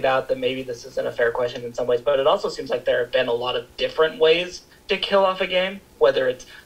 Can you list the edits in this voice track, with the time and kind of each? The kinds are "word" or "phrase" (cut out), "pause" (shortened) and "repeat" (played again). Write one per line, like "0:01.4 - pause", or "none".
0:04.7 - pause